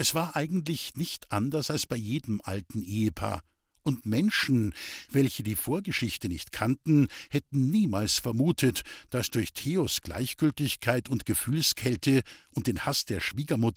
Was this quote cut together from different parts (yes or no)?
no